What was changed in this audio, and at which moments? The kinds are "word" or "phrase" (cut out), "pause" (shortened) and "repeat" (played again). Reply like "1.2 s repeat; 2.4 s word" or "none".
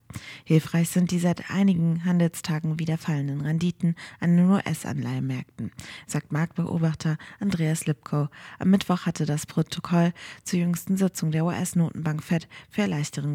none